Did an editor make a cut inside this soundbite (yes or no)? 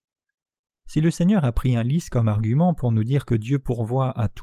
no